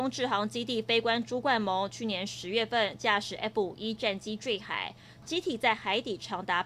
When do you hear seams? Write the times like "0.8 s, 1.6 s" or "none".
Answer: none